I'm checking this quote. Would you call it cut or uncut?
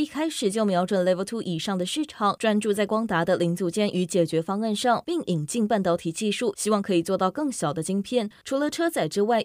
uncut